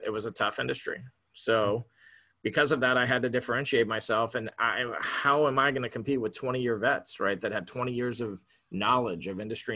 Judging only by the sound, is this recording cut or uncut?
uncut